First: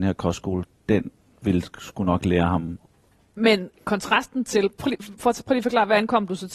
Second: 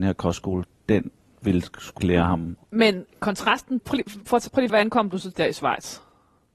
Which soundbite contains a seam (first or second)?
second